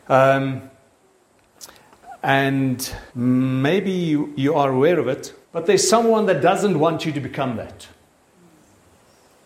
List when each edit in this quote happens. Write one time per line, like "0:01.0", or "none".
0:03.1
0:05.4